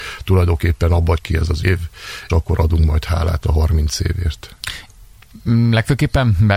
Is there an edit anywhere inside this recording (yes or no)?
yes